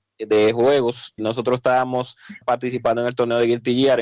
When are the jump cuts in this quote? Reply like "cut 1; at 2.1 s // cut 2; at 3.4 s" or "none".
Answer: cut 1; at 1.2 s // cut 2; at 2.4 s